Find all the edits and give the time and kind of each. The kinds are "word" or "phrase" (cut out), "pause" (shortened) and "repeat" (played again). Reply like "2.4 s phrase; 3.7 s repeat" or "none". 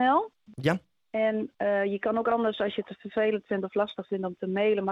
none